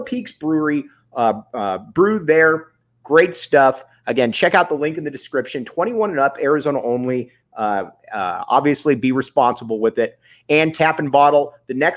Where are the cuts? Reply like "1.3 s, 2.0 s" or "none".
none